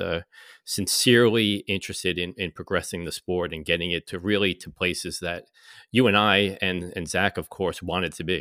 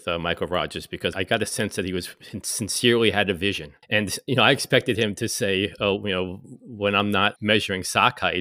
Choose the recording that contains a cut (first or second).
second